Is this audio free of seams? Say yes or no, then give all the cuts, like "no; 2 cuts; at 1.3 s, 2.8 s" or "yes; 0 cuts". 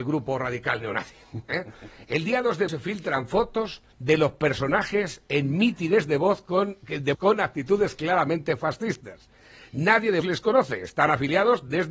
no; 4 cuts; at 2.7 s, 3.9 s, 7.1 s, 10.2 s